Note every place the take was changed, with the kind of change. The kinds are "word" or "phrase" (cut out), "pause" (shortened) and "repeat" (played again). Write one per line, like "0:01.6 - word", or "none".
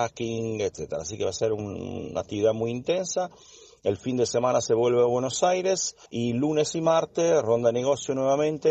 0:06.1 - pause